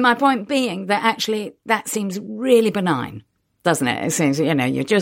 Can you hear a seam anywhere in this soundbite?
no; 0 cuts

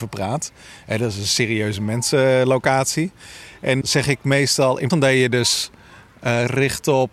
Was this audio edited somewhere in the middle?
yes; 2 cuts; at 3.8 s, 4.9 s

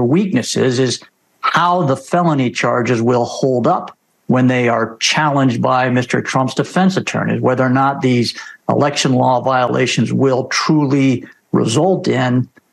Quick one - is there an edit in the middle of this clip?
no; 0 cuts

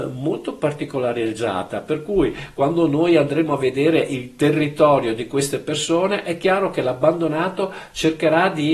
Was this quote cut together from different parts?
no; 0 cuts

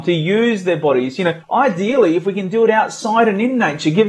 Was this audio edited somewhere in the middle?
yes; 1 cut; at 1.4 s

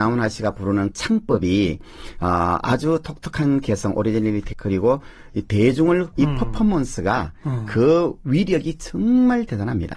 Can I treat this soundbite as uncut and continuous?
no; 3 cuts; at 0.9 s, 4.5 s, 6.1 s

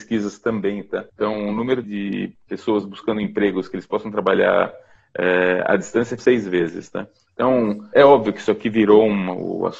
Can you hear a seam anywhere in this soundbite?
yes; 4 cuts; at 1.1 s, 1.8 s, 6.2 s, 7.9 s

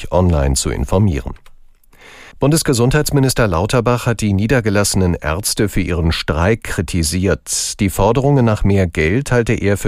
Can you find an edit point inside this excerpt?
yes; 1 cut; at 2.3 s

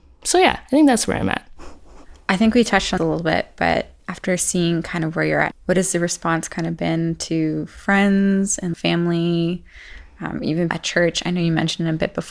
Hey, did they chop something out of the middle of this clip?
yes; 6 cuts; at 2.2 s, 3.0 s, 4.0 s, 5.5 s, 8.7 s, 10.7 s

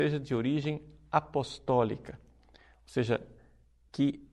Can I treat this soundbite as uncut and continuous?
yes; 0 cuts

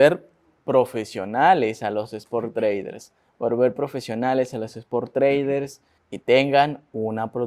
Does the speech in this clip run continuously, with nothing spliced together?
no; 1 cut; at 6.0 s

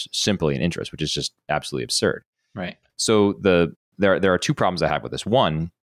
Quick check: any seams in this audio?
no; 0 cuts

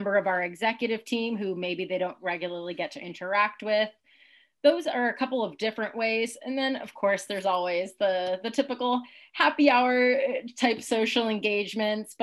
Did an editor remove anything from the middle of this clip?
no; 0 cuts

